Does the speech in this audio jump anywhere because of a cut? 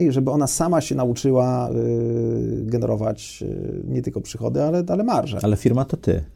no; 0 cuts

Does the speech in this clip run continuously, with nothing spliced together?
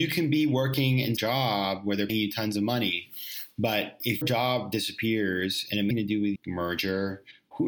no; 5 cuts; at 1.2 s, 2.1 s, 4.2 s, 5.9 s, 6.4 s

